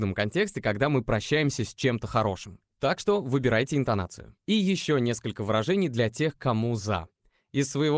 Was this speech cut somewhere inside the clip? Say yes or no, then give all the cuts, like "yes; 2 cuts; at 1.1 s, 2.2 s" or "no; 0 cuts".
no; 0 cuts